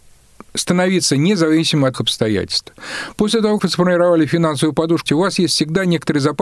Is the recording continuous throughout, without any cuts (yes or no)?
no